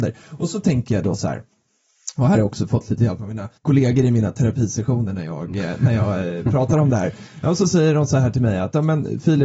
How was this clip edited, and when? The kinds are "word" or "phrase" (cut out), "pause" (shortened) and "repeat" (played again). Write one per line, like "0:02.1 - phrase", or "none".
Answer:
0:03.6 - pause